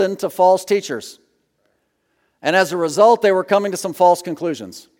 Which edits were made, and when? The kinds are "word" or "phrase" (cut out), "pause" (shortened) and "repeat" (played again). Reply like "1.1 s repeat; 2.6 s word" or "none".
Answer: none